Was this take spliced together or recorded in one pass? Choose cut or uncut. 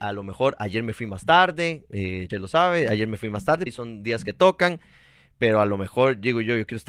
cut